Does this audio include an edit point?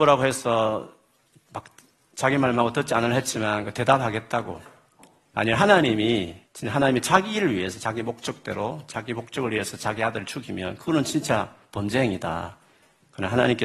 yes; 1 cut; at 6.5 s

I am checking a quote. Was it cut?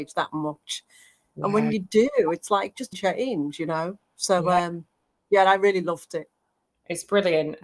yes; 1 cut; at 2.9 s

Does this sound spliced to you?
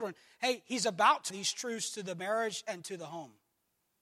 yes; 1 cut; at 1.3 s

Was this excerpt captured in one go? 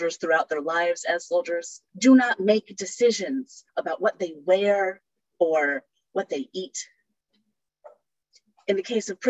no; 2 cuts; at 1.9 s, 3.7 s

